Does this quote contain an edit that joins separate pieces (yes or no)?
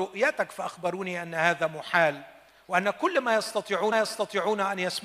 yes